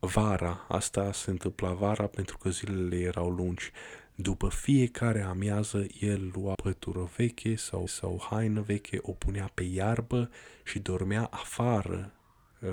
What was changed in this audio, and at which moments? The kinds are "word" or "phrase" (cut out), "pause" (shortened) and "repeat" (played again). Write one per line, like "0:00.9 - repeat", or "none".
0:06.5 - word
0:07.9 - repeat